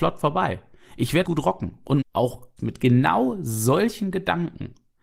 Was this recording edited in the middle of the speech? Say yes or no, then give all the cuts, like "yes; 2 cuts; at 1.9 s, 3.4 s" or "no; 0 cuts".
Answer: yes; 3 cuts; at 1.2 s, 2.0 s, 2.6 s